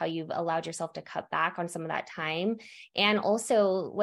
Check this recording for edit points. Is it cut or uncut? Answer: uncut